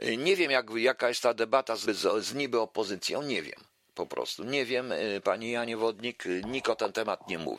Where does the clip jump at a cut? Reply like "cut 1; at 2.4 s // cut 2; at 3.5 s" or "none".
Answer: cut 1; at 1.9 s